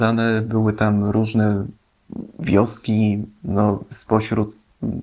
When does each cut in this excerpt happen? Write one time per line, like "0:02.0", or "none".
none